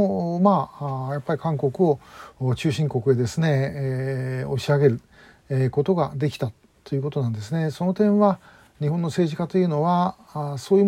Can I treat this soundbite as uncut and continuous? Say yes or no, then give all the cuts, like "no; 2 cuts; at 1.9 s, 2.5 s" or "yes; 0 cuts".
yes; 0 cuts